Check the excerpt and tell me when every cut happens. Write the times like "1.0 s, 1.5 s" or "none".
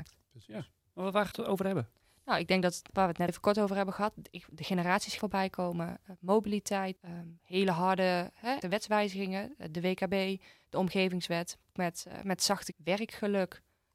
1.3 s, 2.9 s, 3.3 s, 5.2 s, 7.0 s, 8.6 s, 11.8 s, 12.7 s

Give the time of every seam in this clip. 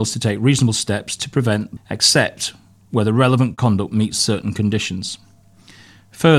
1.8 s

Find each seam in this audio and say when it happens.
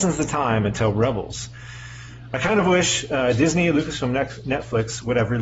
none

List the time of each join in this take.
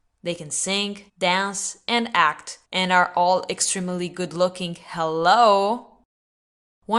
1.1 s, 2.6 s

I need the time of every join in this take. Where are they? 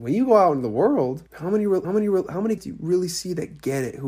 1.3 s, 1.8 s, 2.6 s

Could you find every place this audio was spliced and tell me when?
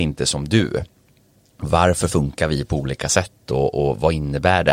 none

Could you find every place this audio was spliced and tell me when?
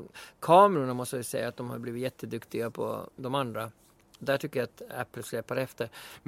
none

